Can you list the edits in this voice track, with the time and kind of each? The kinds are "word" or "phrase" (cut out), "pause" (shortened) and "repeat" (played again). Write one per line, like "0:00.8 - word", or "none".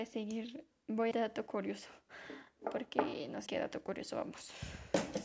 0:01.1 - phrase
0:03.5 - word

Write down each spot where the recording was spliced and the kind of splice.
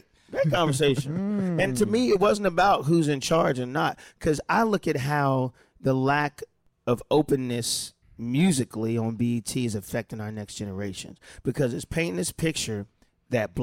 0:08.0 - pause

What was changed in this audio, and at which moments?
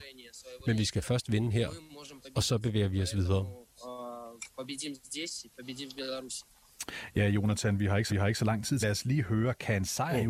0:08.1 - repeat
0:08.8 - phrase

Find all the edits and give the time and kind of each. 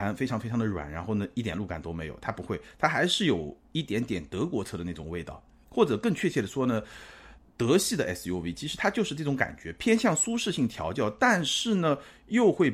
none

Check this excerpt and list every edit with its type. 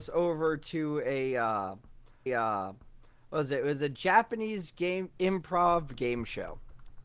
0:02.3 - repeat

